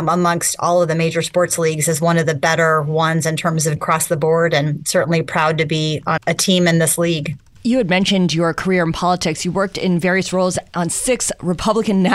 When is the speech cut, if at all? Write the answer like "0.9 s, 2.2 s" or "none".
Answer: 3.8 s, 6.2 s